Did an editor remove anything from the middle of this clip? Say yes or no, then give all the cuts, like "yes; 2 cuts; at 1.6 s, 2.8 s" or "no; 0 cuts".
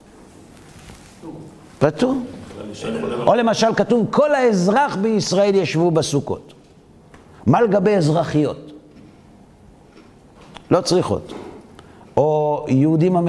no; 0 cuts